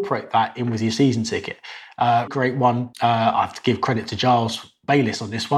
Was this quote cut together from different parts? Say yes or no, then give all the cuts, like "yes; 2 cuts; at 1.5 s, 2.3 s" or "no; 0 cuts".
yes; 2 cuts; at 2.3 s, 2.9 s